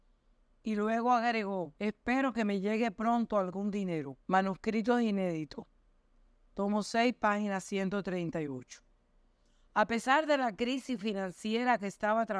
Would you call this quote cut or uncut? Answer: cut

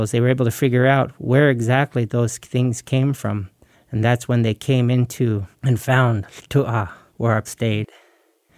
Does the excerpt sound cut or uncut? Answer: cut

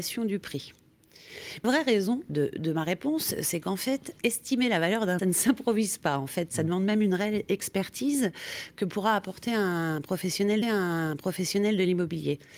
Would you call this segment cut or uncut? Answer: cut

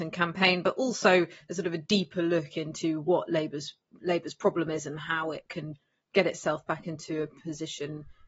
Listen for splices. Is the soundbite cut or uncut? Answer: uncut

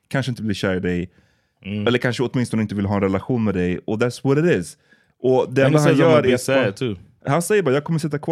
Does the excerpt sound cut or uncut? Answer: uncut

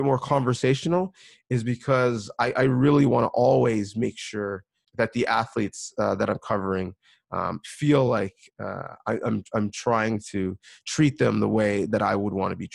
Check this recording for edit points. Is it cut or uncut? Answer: uncut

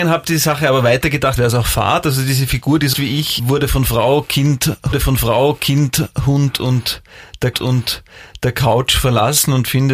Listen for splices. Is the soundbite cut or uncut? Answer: cut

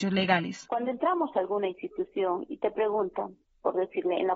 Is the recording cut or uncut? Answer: uncut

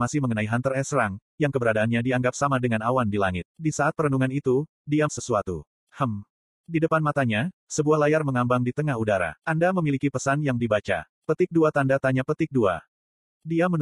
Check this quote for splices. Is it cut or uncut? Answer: cut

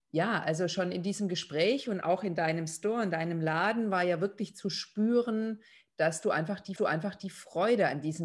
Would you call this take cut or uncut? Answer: cut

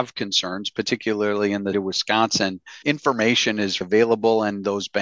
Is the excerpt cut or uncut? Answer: cut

